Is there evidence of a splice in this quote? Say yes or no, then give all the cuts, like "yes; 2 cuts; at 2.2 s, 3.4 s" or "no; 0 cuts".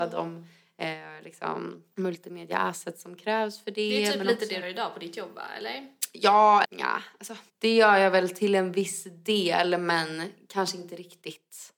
yes; 4 cuts; at 1.9 s, 4.6 s, 6.6 s, 7.5 s